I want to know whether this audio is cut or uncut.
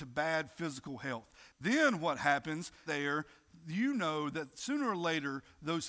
cut